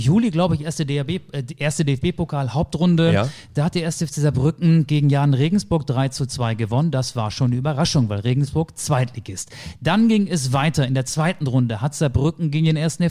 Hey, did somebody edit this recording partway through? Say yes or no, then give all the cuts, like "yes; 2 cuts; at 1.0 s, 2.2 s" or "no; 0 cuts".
no; 0 cuts